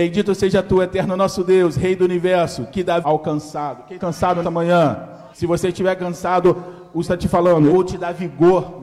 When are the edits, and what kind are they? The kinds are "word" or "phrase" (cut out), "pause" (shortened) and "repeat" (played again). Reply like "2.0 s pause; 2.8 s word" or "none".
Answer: 3.0 s word; 4.0 s word; 4.4 s word; 5.3 s pause; 7.0 s word; 7.7 s word